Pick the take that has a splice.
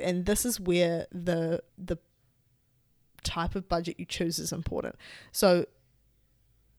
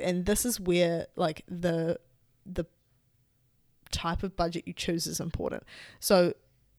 first; 2 cuts; at 1.1 s, 1.7 s

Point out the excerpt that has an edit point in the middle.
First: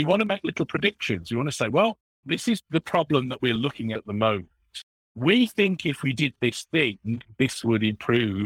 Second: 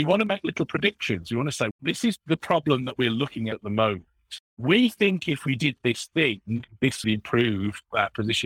second; 3 cuts; at 1.7 s, 4.5 s, 7.0 s

